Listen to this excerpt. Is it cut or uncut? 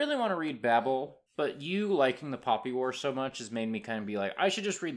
cut